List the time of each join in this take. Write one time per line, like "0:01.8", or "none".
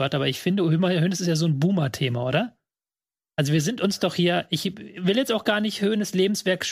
none